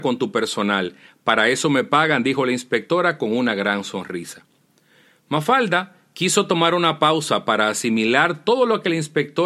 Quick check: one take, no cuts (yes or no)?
yes